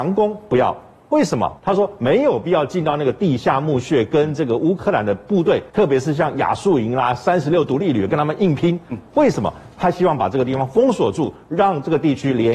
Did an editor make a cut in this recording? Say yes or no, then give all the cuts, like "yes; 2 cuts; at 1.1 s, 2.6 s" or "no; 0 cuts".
yes; 2 cuts; at 1.6 s, 5.7 s